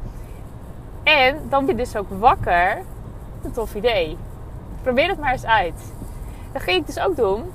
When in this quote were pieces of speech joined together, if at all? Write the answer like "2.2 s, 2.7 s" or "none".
1.7 s, 3.4 s